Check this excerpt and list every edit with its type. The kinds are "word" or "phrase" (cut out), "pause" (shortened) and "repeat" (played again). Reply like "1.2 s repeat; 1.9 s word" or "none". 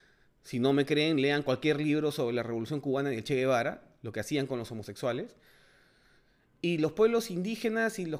none